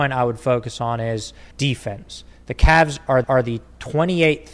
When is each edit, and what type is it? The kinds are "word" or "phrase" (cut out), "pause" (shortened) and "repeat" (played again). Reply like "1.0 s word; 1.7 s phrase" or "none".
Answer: 1.5 s pause; 3.2 s repeat